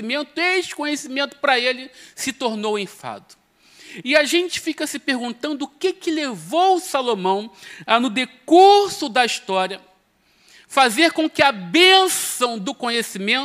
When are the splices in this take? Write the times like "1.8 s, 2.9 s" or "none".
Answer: none